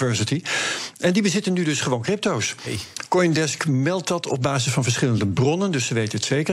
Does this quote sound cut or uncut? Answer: uncut